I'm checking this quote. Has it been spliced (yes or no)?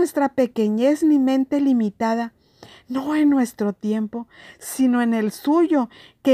no